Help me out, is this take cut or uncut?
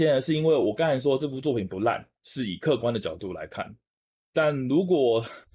uncut